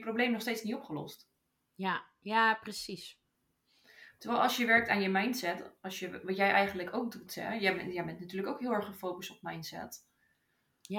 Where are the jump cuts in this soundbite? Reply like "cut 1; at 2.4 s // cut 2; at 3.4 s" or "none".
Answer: none